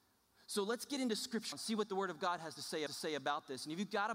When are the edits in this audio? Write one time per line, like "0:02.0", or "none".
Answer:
0:01.5
0:02.9